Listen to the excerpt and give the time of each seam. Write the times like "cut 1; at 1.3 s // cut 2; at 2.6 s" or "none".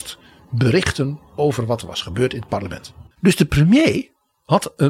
cut 1; at 3.1 s